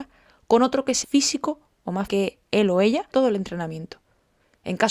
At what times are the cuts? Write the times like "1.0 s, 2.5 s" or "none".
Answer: 1.0 s, 2.1 s, 3.1 s

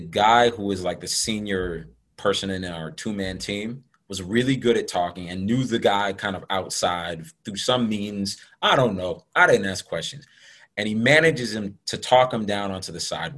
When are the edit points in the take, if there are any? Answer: none

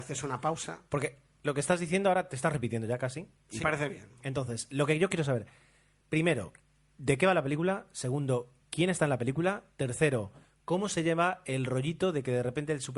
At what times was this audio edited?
3.6 s

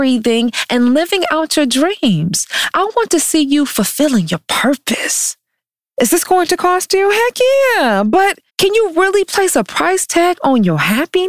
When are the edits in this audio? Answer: 5.6 s, 8.5 s

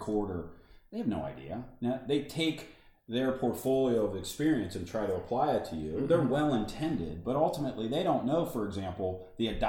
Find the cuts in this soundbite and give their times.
none

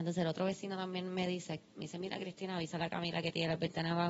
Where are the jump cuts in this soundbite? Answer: none

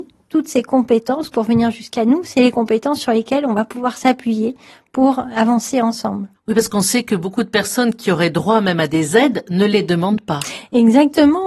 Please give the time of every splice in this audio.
1.3 s, 6.3 s

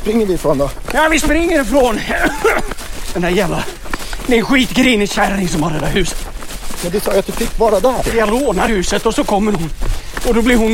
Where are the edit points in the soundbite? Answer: none

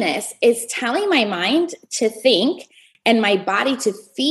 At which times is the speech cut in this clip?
none

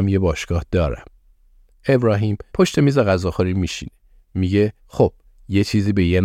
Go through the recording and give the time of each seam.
2.5 s, 4.8 s

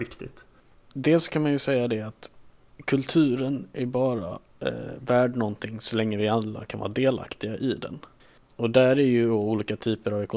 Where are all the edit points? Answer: none

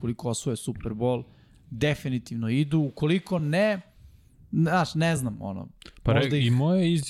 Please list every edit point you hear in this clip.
none

